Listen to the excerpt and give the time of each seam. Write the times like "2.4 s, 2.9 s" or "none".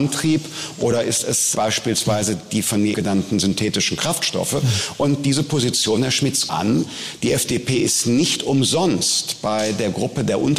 1.5 s, 2.9 s, 6.5 s